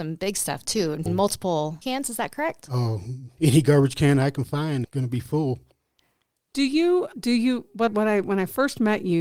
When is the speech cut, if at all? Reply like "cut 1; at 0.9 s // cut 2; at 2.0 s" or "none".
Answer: cut 1; at 1.1 s // cut 2; at 1.8 s // cut 3; at 3.4 s // cut 4; at 4.8 s // cut 5; at 7.1 s // cut 6; at 7.9 s